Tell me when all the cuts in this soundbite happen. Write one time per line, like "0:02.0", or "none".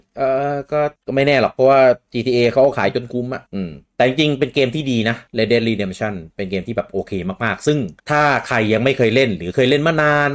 0:01.0
0:03.5
0:03.8
0:05.3
0:08.0